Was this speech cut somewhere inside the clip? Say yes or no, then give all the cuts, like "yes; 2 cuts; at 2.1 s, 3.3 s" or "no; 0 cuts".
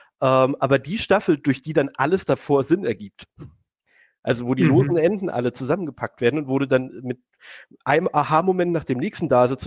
no; 0 cuts